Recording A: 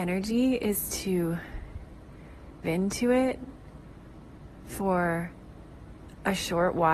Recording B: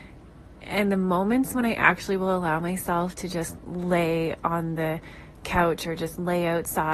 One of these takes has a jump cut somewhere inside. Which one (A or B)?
A